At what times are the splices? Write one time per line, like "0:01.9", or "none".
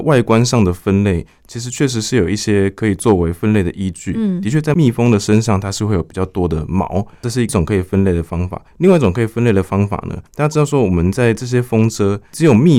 0:08.7
0:10.3